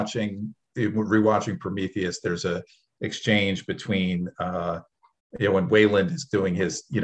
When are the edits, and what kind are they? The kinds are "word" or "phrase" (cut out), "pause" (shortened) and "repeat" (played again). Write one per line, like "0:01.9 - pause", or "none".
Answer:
none